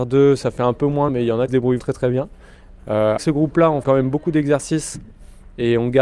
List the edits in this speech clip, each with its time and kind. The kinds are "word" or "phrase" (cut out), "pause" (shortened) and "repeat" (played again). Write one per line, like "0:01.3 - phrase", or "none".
0:01.1 - word
0:01.5 - word
0:01.8 - word
0:03.2 - word
0:03.8 - word